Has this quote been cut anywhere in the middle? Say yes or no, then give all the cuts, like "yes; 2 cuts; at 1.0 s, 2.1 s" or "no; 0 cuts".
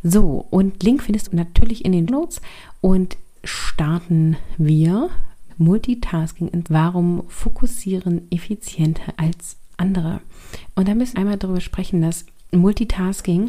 yes; 8 cuts; at 1.3 s, 2.1 s, 3.4 s, 5.5 s, 6.7 s, 9.1 s, 9.7 s, 11.1 s